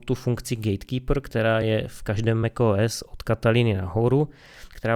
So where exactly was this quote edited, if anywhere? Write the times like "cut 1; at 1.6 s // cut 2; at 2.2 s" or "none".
none